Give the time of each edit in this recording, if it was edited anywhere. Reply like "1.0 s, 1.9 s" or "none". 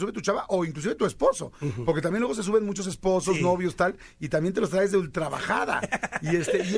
none